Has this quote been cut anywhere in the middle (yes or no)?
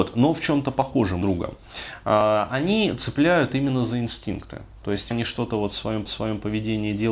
yes